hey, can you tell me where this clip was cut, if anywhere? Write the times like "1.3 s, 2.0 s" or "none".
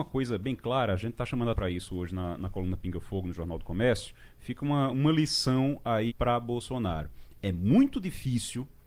1.5 s, 4.9 s, 6.1 s